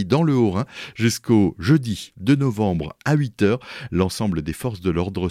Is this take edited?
no; 0 cuts

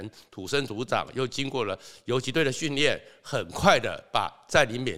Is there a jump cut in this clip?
no; 0 cuts

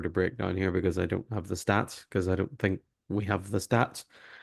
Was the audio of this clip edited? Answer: no; 0 cuts

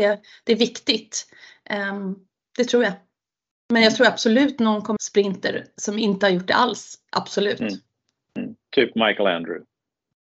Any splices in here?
yes; 1 cut; at 5.0 s

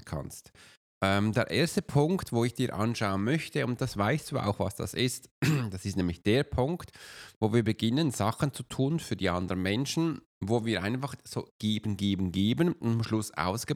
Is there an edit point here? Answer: yes; 1 cut; at 10.3 s

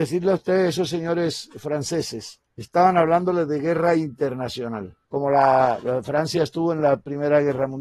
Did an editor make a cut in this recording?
yes; 2 cuts; at 2.5 s, 5.0 s

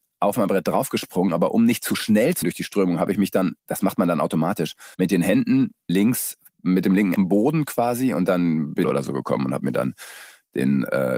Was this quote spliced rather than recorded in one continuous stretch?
yes; 6 cuts; at 2.4 s, 3.6 s, 4.9 s, 5.9 s, 7.2 s, 8.8 s

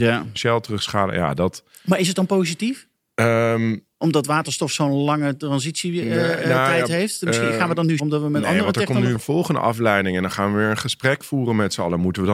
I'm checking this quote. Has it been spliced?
yes; 3 cuts; at 3.0 s, 8.0 s, 9.2 s

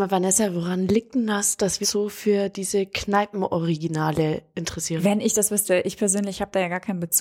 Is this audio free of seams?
no; 1 cut; at 1.8 s

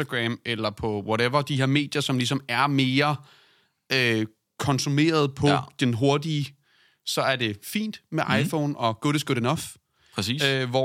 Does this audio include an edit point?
no; 0 cuts

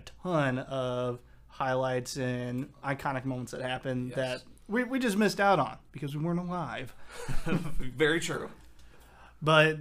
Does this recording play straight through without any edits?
yes; 0 cuts

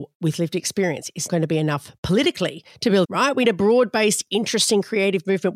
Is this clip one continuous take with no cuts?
no; 3 cuts; at 1.3 s, 3.0 s, 3.4 s

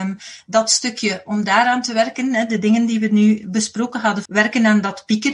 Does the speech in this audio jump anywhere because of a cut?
yes; 1 cut; at 4.3 s

